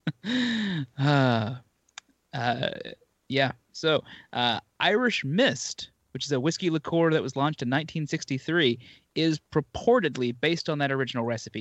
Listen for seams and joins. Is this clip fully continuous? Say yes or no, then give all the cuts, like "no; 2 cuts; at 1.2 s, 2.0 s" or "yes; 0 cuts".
yes; 0 cuts